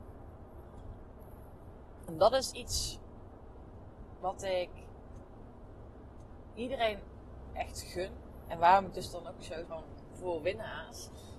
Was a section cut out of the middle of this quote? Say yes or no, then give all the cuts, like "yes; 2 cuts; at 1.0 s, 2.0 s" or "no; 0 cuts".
yes; 1 cut; at 9.7 s